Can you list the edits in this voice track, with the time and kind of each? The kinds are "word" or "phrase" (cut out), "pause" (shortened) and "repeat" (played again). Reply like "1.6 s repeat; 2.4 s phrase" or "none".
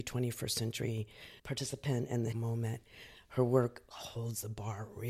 1.4 s pause; 2.3 s word